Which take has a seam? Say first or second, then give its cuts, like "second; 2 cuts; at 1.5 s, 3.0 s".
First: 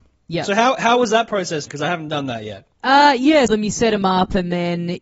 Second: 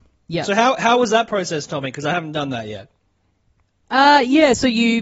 first; 3 cuts; at 1.7 s, 2.7 s, 3.5 s